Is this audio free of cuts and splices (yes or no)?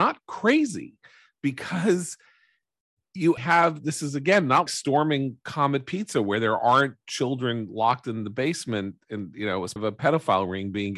no